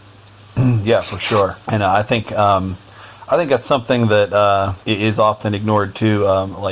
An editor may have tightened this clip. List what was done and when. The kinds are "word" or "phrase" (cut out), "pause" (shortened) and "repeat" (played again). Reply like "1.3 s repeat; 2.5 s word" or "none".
1.6 s pause; 4.8 s pause